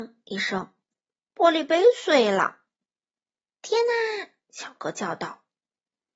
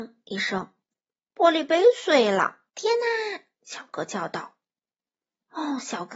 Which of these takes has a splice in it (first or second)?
second